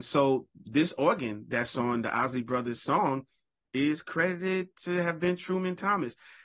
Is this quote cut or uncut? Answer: uncut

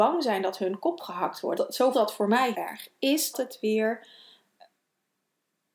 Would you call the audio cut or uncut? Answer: cut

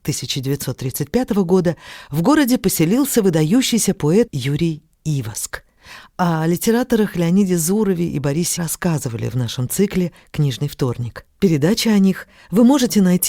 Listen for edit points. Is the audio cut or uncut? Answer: cut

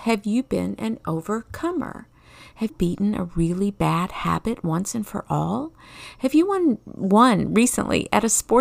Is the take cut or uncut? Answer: cut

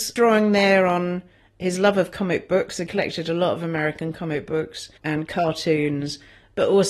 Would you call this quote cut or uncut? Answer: cut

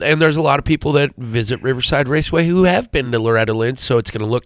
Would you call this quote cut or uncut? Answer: uncut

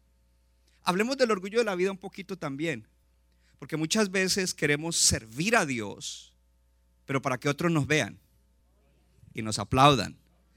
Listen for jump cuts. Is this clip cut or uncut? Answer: uncut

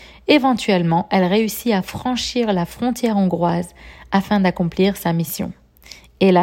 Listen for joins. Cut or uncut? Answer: uncut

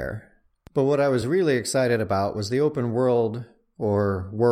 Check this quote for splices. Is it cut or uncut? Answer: uncut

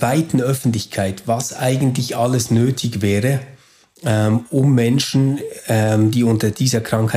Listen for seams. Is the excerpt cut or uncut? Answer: uncut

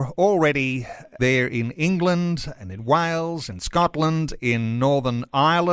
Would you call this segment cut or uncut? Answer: cut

